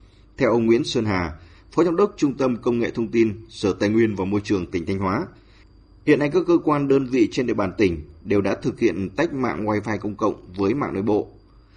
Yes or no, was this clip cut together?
no